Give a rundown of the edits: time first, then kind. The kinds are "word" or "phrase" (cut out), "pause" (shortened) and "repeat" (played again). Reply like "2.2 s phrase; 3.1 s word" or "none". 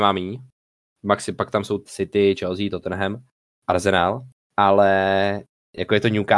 1.9 s phrase; 3.5 s pause